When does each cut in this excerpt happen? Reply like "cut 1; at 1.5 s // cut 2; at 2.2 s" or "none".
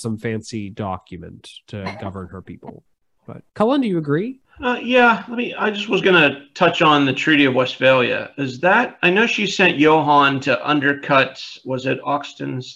cut 1; at 3.5 s